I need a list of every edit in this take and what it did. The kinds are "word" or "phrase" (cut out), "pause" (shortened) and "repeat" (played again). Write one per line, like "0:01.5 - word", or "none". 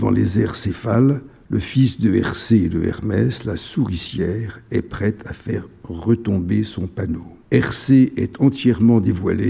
0:07.4 - pause